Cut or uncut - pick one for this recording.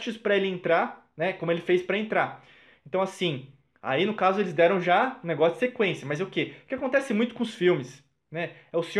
uncut